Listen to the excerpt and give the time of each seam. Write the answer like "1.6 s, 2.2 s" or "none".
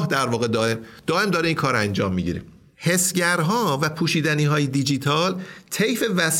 none